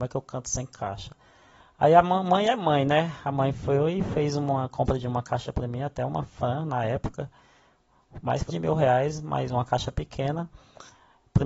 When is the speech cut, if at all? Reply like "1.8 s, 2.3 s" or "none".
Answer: 8.5 s